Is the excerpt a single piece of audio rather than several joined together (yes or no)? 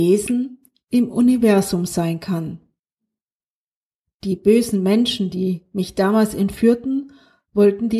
yes